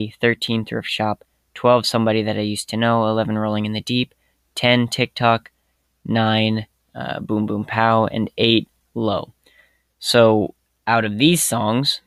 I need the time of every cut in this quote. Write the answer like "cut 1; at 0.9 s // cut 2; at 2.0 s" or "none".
none